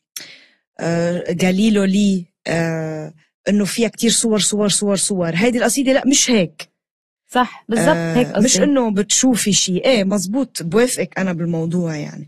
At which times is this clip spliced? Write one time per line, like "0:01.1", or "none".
none